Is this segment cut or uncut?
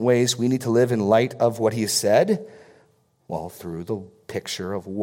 uncut